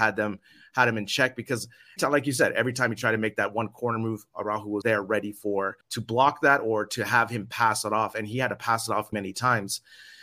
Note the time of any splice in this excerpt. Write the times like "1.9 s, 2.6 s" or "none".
2.0 s, 4.8 s, 5.8 s, 9.1 s